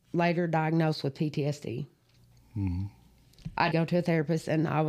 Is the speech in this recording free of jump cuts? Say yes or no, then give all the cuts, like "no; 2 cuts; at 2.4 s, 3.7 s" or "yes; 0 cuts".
no; 1 cut; at 3.7 s